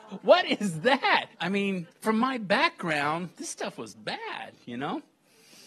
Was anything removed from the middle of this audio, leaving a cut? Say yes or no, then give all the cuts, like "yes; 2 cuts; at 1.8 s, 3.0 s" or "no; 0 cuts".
yes; 2 cuts; at 1.3 s, 1.9 s